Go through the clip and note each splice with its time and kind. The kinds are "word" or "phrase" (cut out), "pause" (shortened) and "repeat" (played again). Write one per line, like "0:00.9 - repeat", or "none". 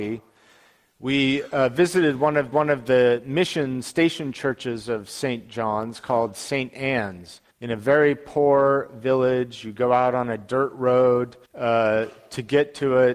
0:02.5 - repeat
0:07.5 - pause
0:11.4 - pause